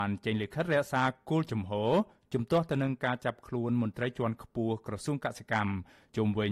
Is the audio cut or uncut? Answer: uncut